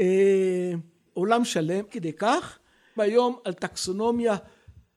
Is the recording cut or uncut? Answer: cut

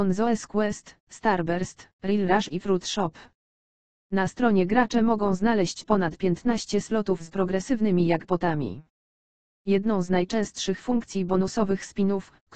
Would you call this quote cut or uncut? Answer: uncut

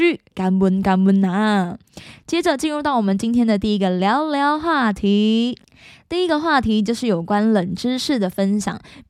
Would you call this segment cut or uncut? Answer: uncut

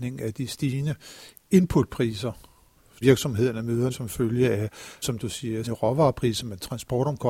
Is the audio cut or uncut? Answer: cut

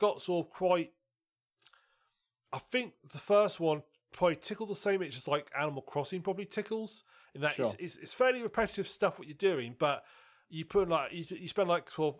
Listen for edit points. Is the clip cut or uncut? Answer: uncut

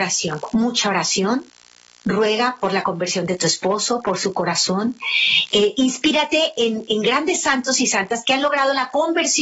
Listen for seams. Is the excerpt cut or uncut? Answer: uncut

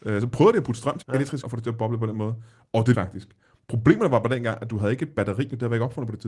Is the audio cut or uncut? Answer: cut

